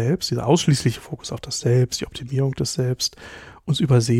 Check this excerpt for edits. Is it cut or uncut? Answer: uncut